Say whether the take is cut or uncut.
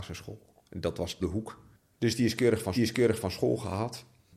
cut